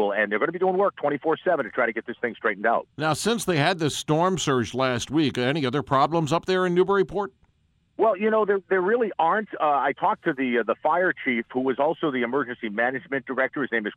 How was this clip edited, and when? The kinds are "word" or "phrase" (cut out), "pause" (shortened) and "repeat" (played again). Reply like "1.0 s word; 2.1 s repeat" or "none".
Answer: none